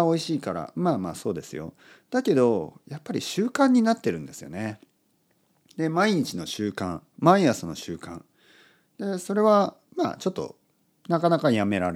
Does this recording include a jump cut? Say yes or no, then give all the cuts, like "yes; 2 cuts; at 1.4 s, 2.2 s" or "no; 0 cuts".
no; 0 cuts